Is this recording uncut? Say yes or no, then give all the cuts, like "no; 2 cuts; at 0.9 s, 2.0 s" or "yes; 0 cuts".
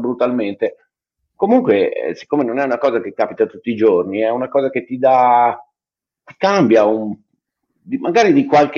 yes; 0 cuts